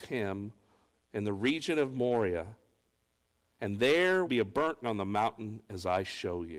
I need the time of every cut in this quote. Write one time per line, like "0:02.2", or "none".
0:04.3
0:04.8